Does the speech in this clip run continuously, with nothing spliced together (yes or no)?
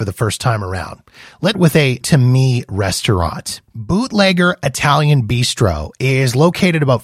no